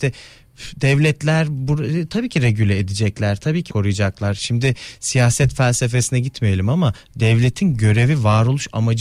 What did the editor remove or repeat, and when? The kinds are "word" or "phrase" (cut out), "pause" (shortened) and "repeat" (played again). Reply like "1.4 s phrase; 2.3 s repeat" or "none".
3.7 s word